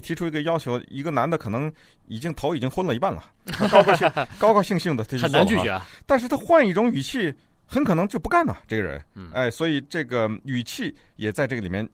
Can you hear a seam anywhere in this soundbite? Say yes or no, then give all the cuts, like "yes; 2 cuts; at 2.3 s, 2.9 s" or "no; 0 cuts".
no; 0 cuts